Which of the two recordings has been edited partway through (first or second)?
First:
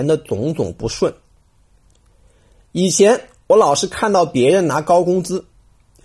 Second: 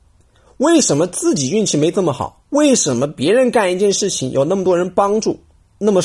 second